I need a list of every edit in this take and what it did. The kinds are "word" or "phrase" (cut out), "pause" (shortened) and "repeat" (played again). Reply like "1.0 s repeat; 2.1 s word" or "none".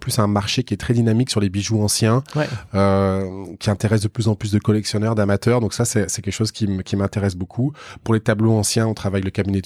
none

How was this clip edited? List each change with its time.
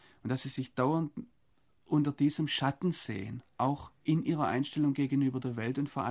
none

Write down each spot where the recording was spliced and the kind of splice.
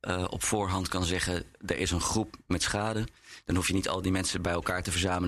none

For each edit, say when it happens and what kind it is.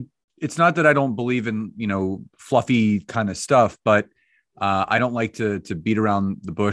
none

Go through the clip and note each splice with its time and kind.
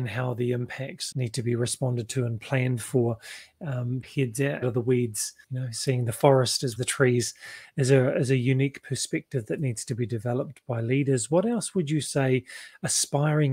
1.1 s word; 4.0 s phrase; 4.6 s word; 5.4 s pause; 6.8 s phrase

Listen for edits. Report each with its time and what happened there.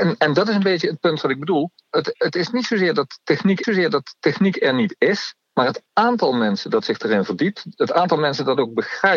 3.6 s repeat; 5.4 s pause

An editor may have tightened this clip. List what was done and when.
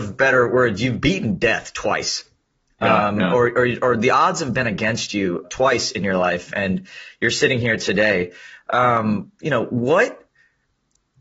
5.4 s word

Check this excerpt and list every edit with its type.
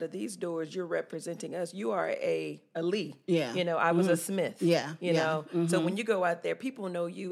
none

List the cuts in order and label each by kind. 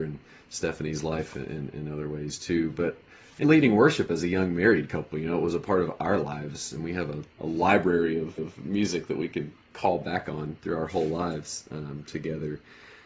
3.4 s word; 8.4 s repeat

